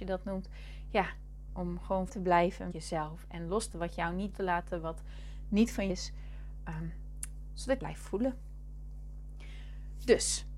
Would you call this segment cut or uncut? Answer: cut